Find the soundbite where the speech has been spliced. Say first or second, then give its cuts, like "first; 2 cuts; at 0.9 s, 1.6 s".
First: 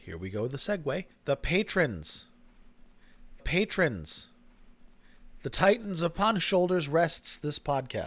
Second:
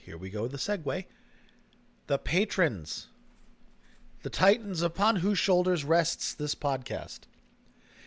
first; 3 cuts; at 1.1 s, 3.4 s, 6.4 s